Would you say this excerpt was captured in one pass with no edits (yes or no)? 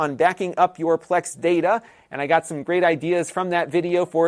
yes